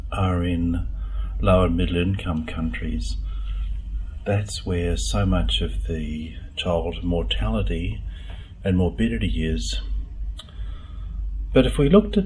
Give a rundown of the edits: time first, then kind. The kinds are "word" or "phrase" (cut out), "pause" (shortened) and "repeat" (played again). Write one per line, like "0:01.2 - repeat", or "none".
none